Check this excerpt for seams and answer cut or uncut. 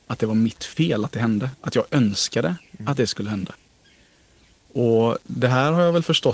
uncut